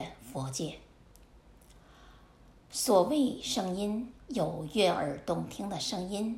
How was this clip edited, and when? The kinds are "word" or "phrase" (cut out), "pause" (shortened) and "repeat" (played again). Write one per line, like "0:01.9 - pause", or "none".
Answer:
0:02.6 - pause